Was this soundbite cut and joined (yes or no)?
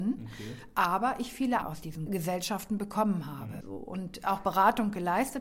yes